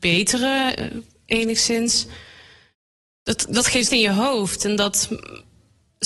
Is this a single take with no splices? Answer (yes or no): no